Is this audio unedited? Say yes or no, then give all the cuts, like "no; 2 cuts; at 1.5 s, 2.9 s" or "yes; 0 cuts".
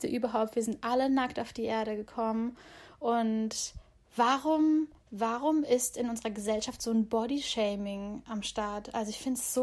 no; 1 cut; at 5.0 s